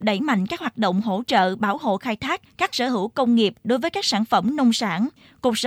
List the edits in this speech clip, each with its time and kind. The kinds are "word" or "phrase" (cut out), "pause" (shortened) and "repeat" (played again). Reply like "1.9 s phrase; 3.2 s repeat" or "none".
2.7 s phrase